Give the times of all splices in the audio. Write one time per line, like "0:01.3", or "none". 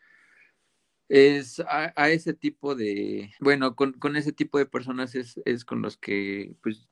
0:03.4

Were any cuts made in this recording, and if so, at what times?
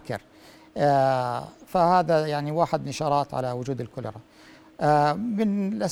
none

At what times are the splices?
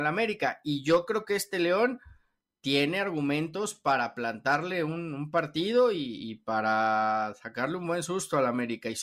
none

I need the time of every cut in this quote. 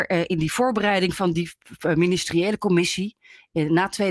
none

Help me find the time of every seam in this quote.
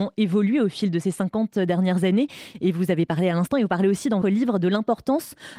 0:04.2

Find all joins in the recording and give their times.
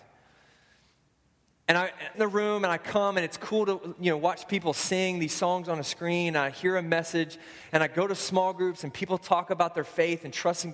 0:02.1

